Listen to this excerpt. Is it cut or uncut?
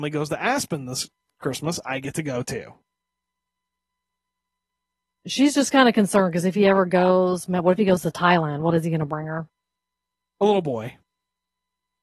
uncut